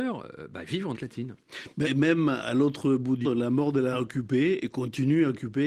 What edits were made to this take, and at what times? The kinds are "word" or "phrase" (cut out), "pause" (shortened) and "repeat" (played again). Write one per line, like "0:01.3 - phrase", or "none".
0:00.9 - word
0:01.8 - word
0:03.2 - word
0:03.9 - word